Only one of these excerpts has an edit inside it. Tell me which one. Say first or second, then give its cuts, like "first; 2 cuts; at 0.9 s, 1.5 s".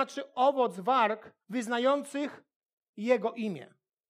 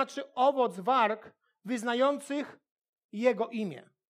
first; 1 cut; at 1.4 s